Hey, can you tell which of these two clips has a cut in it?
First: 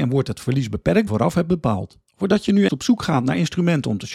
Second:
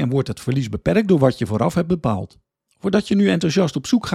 first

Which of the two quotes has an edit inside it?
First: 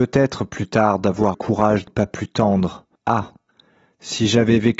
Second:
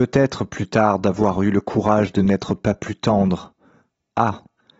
first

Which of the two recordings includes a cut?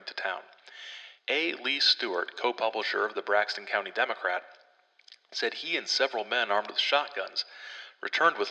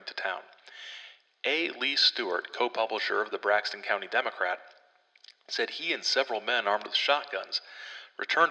first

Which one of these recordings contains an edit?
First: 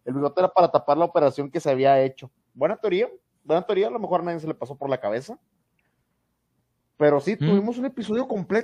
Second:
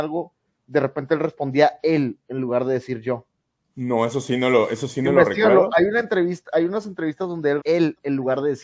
second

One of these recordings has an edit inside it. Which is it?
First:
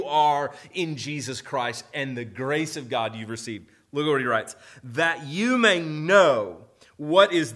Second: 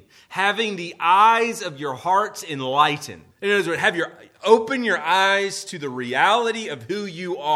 second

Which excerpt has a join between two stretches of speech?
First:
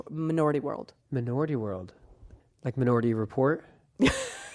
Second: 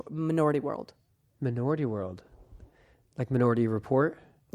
first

